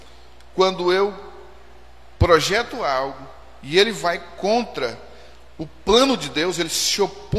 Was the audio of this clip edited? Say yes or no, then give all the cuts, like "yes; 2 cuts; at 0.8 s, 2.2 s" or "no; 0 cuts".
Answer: no; 0 cuts